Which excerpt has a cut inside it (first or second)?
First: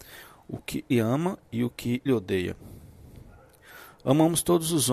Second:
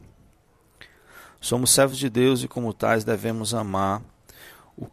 first